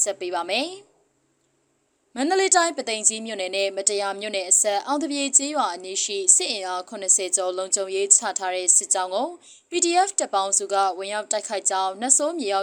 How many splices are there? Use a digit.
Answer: 0